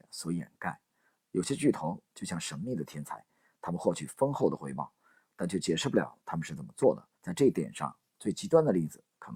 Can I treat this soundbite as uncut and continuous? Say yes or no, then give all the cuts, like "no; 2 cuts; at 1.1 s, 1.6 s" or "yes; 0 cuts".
no; 1 cut; at 7.1 s